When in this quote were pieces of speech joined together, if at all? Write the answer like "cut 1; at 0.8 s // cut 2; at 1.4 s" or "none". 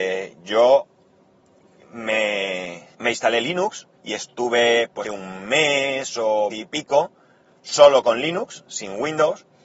cut 1; at 2.9 s // cut 2; at 4.0 s // cut 3; at 5.0 s // cut 4; at 6.5 s